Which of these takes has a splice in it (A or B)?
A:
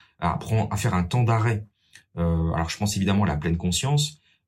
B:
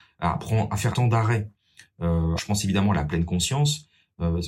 B